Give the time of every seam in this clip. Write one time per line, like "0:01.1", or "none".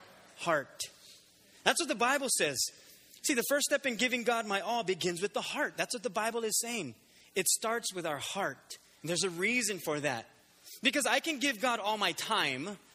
none